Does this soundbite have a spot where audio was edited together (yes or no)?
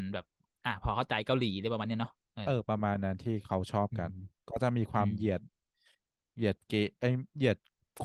no